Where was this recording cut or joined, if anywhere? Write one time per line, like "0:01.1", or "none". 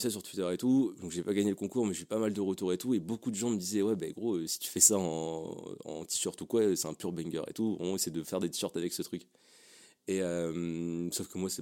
none